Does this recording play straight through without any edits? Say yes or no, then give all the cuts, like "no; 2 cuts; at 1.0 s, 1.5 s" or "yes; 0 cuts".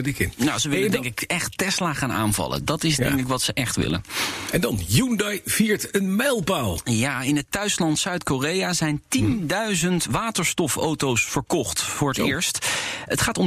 yes; 0 cuts